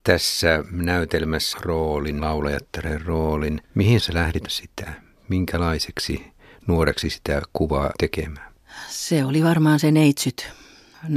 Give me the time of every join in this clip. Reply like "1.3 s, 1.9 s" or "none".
1.5 s, 2.2 s, 4.0 s, 4.5 s, 7.0 s, 7.9 s